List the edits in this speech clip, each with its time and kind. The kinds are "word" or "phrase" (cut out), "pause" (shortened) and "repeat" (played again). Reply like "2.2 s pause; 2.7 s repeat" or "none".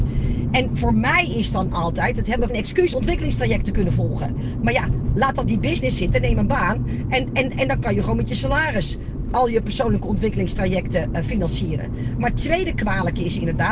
2.5 s phrase; 2.9 s phrase; 5.4 s word